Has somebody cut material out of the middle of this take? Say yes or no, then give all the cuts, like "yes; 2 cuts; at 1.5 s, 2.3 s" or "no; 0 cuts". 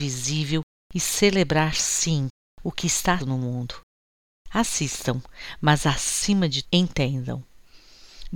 yes; 2 cuts; at 3.2 s, 6.6 s